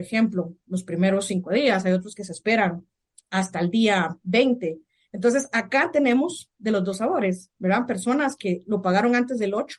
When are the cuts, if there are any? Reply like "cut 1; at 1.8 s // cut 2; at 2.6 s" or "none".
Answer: none